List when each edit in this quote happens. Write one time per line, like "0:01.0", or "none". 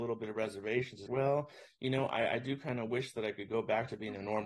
0:01.1